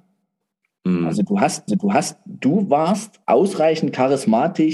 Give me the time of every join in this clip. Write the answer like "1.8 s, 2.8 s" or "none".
1.7 s, 3.2 s